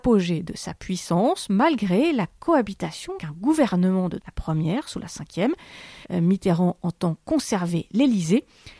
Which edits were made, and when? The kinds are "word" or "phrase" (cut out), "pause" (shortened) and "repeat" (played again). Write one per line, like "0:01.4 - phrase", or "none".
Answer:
0:03.2 - word
0:04.2 - word
0:06.0 - pause